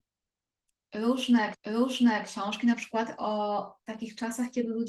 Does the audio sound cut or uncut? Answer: cut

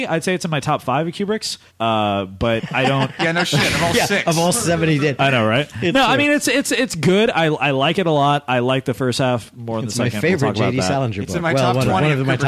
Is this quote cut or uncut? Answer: cut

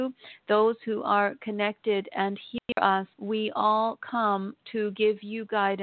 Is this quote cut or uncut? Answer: cut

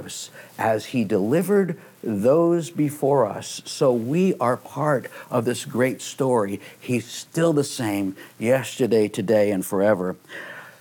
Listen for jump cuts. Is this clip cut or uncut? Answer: uncut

